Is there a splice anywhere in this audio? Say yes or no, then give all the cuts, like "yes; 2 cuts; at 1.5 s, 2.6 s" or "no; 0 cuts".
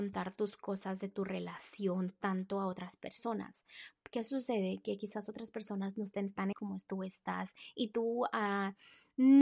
yes; 1 cut; at 6.5 s